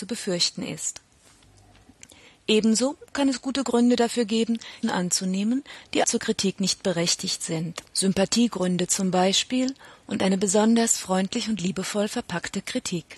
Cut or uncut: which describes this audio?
cut